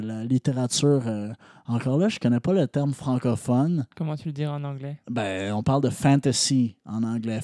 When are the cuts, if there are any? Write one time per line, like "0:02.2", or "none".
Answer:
0:03.9